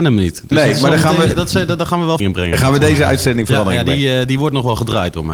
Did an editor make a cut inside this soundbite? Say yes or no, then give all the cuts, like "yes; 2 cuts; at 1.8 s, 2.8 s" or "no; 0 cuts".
yes; 1 cut; at 2.2 s